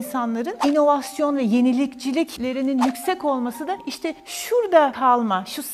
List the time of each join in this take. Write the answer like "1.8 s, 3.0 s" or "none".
none

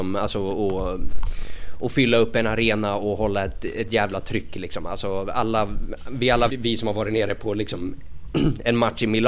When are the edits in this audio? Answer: 6.5 s

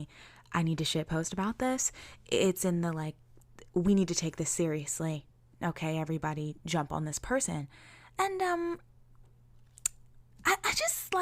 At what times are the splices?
none

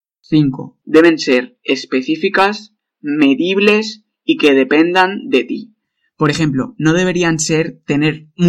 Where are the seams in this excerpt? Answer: none

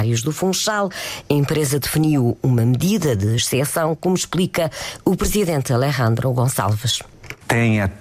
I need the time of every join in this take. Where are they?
none

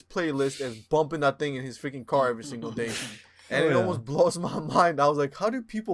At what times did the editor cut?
none

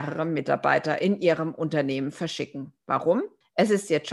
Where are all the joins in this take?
none

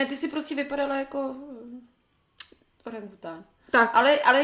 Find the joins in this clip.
none

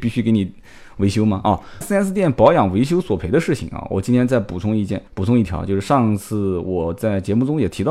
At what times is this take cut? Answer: 1.8 s, 5.1 s

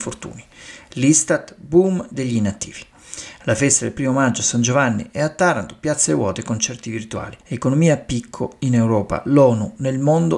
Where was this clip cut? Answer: 7.4 s

